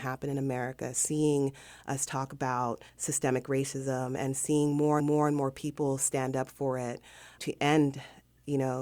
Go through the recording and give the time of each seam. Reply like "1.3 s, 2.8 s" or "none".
2.9 s, 5.0 s, 7.4 s